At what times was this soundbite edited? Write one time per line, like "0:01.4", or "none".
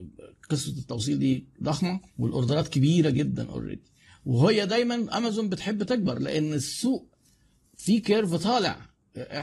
0:02.1